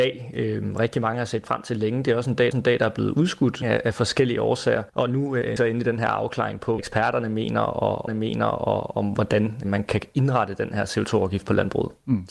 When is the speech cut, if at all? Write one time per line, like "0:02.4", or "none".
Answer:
0:02.5
0:03.6
0:04.9
0:05.6
0:06.8
0:08.1
0:09.6

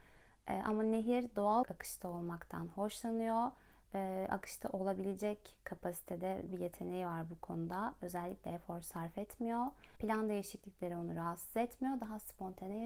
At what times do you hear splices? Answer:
0:01.6
0:06.5
0:10.0

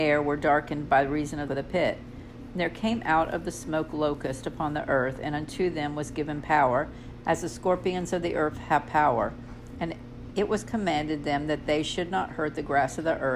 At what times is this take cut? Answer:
0:01.5

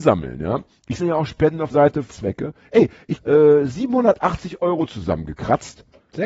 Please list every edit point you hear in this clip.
0:01.0
0:01.7
0:02.1
0:03.2

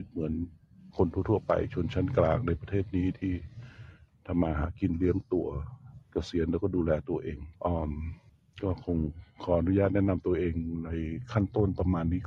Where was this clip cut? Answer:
0:06.0
0:07.6
0:08.3

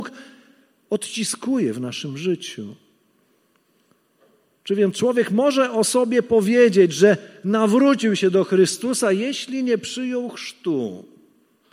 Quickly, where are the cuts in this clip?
none

